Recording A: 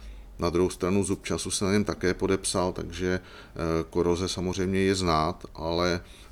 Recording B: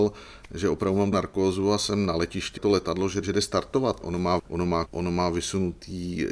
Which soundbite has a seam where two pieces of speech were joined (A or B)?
B